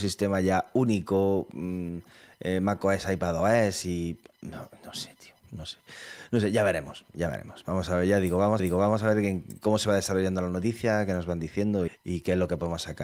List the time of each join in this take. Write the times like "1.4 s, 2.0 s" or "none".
8.6 s, 11.9 s